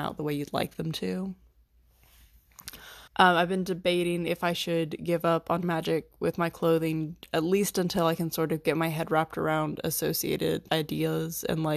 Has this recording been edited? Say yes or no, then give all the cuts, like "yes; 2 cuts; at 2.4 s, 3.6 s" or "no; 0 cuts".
yes; 3 cuts; at 3.1 s, 5.6 s, 10.7 s